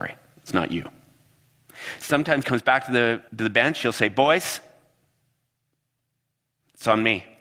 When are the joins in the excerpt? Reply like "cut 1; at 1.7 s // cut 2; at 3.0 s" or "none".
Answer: cut 1; at 2.4 s // cut 2; at 3.3 s

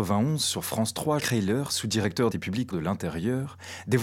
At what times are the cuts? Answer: cut 1; at 1.2 s // cut 2; at 2.3 s // cut 3; at 2.7 s

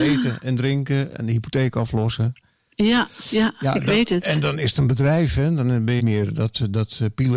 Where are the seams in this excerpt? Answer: cut 1; at 6.0 s

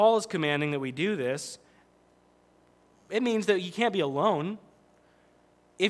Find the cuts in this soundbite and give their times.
none

